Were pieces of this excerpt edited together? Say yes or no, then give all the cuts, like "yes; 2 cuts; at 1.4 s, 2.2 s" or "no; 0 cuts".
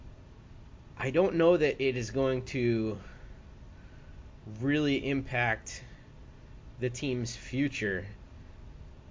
no; 0 cuts